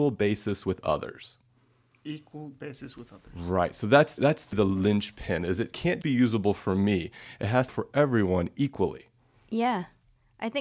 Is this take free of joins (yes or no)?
no